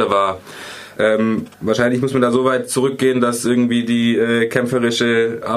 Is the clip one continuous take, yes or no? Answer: yes